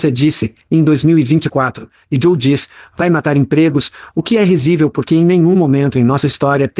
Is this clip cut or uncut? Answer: uncut